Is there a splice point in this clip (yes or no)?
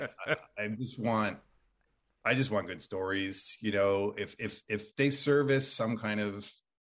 no